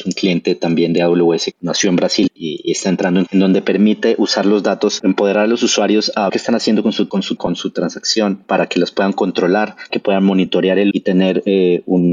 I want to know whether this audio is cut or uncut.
cut